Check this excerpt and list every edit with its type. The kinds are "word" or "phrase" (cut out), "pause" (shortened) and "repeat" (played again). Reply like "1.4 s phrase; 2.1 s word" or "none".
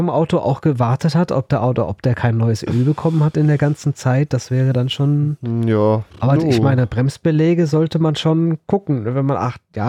6.1 s pause